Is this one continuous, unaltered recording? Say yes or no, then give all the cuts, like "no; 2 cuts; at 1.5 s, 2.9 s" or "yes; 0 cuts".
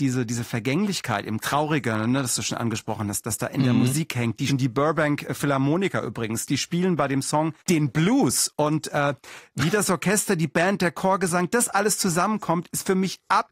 no; 3 cuts; at 1.4 s, 4.5 s, 7.6 s